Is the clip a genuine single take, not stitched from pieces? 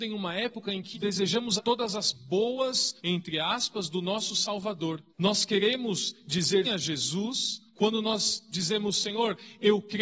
no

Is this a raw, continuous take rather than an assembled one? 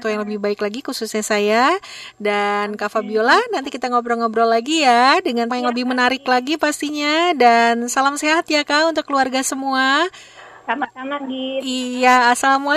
no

